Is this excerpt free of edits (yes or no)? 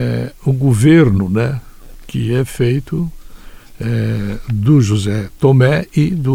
yes